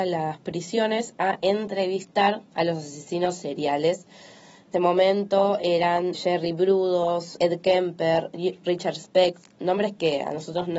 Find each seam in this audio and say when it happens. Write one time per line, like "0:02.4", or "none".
0:04.7
0:06.1
0:07.4